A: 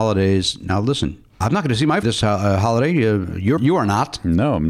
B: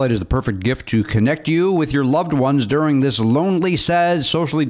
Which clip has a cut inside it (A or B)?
A